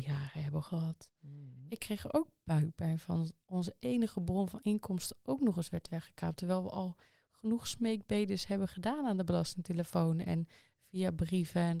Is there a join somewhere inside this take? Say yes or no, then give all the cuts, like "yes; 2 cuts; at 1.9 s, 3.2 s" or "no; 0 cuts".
no; 0 cuts